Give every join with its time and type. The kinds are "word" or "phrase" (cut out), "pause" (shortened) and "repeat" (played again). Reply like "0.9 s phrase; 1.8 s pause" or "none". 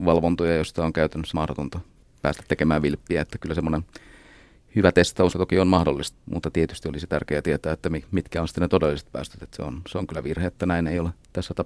1.3 s word; 3.4 s word; 5.3 s word; 6.1 s word